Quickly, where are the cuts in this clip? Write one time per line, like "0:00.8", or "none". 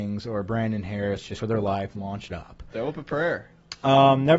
0:01.4
0:02.3